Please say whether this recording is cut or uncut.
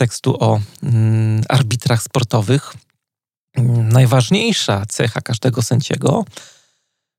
uncut